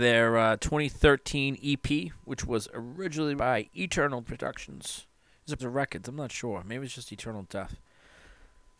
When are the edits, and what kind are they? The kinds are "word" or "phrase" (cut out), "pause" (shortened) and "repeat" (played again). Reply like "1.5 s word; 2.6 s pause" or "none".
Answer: 3.4 s word; 4.2 s word; 5.6 s word